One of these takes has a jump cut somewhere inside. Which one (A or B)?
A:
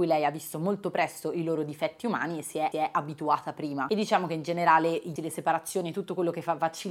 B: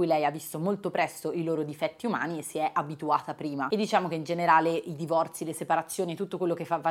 A